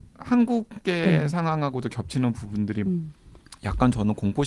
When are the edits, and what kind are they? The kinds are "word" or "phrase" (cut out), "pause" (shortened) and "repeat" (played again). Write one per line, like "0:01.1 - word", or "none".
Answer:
0:02.9 - word

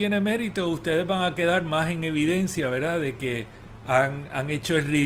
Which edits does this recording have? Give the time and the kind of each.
none

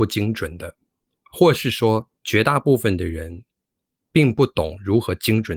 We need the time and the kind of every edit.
0:02.2 - pause

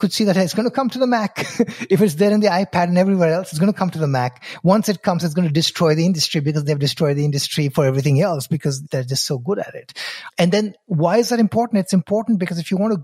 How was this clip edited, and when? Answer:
none

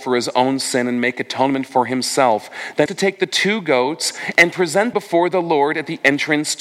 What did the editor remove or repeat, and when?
0:02.9 - word
0:04.9 - word

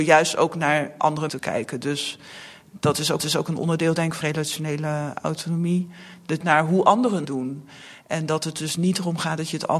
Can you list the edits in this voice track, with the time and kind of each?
0:01.3 - word
0:03.2 - repeat
0:04.2 - word
0:06.4 - phrase
0:07.2 - word

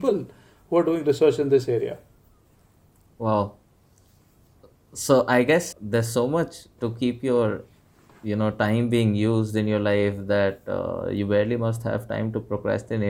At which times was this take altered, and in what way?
0:05.7 - word
0:06.8 - word

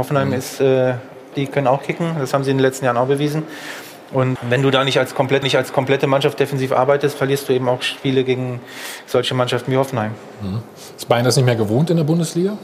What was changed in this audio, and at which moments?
0:01.3 - phrase
0:04.4 - word
0:05.4 - repeat

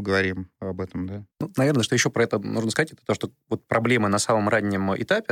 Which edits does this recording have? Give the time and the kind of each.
0:01.3 - pause

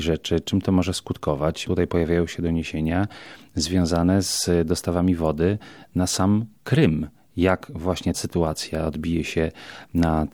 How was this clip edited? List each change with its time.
0:01.7 - word
0:08.1 - word

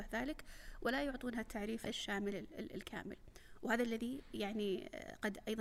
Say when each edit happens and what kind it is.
0:01.8 - word

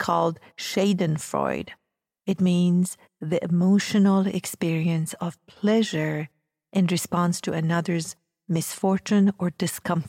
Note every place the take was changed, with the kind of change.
none

